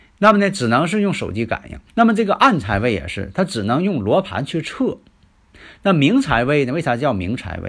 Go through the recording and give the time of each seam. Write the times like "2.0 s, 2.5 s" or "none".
1.9 s